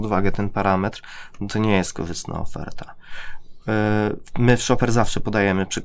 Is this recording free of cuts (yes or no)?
yes